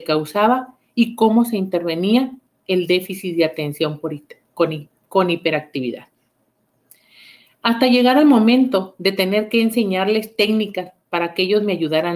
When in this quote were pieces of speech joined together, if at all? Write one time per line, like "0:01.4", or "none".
none